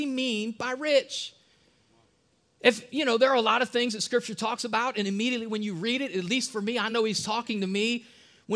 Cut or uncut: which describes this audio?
uncut